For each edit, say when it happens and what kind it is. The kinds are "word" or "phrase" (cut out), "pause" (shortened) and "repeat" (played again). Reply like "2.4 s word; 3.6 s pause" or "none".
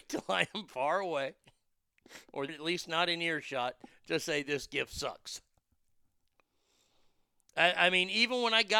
2.5 s word